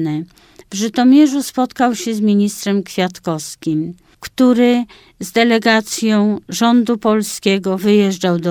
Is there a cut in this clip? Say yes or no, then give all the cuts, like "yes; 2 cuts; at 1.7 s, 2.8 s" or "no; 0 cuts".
no; 0 cuts